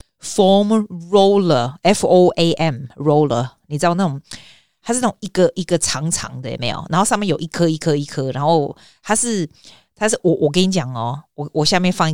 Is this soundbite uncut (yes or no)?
yes